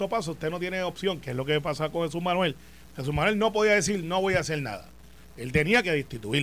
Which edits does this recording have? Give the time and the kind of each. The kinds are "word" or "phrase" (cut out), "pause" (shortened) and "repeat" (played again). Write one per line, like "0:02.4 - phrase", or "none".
none